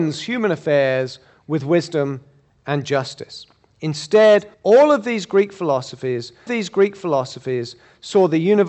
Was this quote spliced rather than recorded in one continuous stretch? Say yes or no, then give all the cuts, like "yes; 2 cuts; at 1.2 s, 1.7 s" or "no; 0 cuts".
yes; 2 cuts; at 4.5 s, 6.5 s